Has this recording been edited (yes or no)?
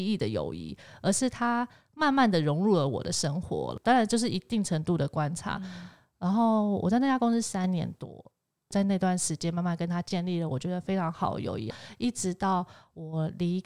no